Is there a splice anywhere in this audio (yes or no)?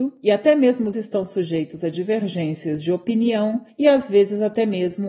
yes